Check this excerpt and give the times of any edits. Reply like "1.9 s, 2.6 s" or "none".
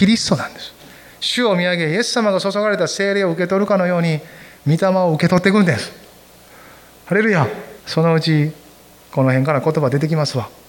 7.8 s